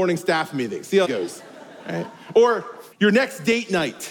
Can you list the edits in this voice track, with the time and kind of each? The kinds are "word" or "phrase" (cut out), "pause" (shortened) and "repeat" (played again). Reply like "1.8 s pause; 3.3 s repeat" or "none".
1.0 s word; 2.9 s pause